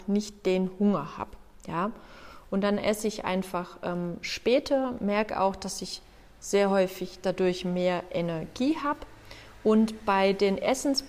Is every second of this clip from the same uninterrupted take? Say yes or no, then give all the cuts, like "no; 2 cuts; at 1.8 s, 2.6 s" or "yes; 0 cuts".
yes; 0 cuts